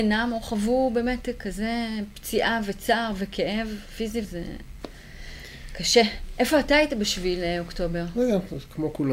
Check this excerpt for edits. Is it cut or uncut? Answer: cut